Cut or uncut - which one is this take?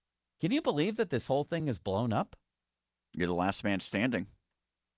uncut